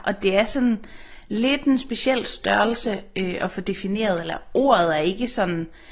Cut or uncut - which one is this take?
uncut